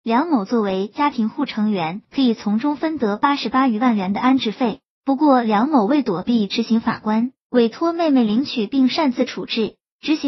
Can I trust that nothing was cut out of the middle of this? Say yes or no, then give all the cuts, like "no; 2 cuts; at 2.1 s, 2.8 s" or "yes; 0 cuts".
no; 1 cut; at 2.0 s